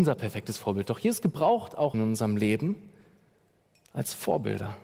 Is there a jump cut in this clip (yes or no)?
yes